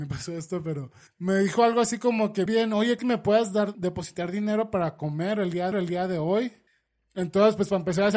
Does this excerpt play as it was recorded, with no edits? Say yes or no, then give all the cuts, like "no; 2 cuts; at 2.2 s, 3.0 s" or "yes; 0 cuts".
no; 6 cuts; at 1.1 s, 2.5 s, 3.0 s, 3.7 s, 5.7 s, 6.7 s